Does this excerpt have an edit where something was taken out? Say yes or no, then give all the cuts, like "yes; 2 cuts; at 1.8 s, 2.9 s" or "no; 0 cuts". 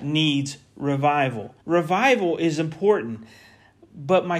yes; 1 cut; at 1.6 s